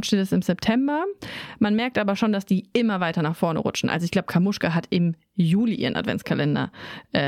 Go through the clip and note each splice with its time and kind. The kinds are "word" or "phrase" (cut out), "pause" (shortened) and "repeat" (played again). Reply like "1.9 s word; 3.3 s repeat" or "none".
none